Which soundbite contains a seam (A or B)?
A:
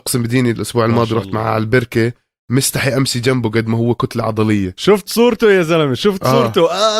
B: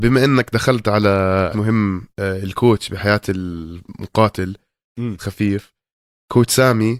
B